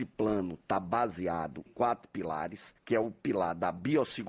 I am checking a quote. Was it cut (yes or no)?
yes